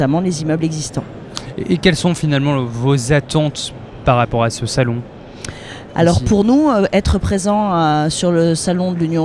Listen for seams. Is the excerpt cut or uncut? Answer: uncut